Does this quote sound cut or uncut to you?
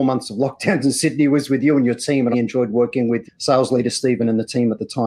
cut